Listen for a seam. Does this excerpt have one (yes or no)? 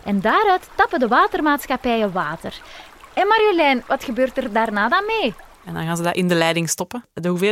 no